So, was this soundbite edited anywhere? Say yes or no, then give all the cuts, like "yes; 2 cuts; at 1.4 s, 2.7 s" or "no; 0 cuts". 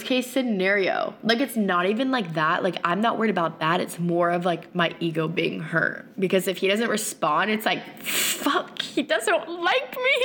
no; 0 cuts